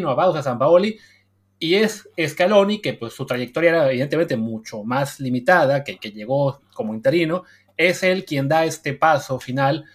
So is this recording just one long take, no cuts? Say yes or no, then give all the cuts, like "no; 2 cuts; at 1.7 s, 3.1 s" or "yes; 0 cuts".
yes; 0 cuts